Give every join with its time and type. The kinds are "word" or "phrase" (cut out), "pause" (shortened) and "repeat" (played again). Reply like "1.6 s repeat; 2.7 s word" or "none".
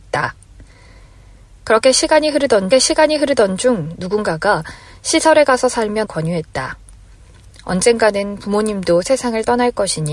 2.7 s repeat; 6.0 s word